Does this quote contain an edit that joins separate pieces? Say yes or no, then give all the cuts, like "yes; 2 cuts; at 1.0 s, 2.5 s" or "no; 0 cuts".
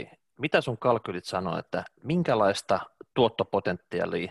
no; 0 cuts